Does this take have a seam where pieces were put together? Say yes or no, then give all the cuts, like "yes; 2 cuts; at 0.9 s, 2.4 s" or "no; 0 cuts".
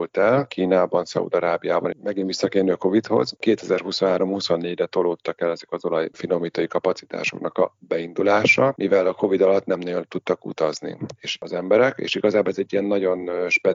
yes; 1 cut; at 1.9 s